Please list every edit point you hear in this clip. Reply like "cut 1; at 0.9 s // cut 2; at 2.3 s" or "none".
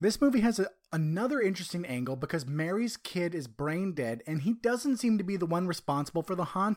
none